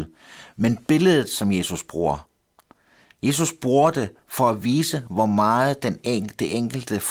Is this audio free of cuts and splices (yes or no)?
yes